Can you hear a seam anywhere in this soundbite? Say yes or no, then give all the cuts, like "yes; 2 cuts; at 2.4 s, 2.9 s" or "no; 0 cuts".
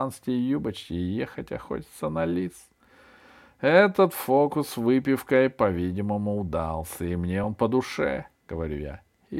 no; 0 cuts